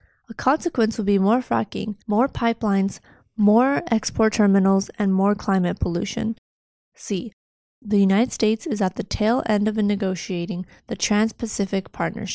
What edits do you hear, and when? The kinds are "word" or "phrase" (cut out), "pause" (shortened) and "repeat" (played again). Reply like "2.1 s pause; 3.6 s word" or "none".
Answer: 2.0 s pause; 6.5 s pause